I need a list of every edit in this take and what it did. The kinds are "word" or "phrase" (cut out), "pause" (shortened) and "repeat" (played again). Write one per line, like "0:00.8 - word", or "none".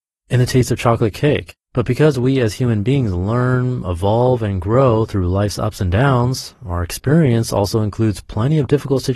0:01.6 - pause